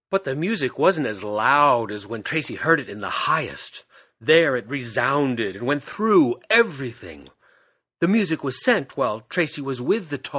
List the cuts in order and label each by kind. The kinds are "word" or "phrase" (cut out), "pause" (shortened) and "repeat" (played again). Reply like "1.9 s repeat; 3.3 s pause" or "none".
none